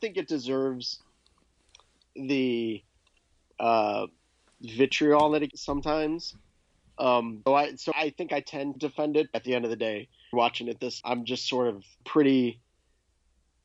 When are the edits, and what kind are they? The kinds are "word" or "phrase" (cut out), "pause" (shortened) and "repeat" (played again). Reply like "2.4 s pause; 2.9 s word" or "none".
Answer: 5.5 s word; 7.5 s word; 7.9 s word; 8.8 s word; 9.3 s word; 10.3 s word; 11.0 s word; 12.0 s word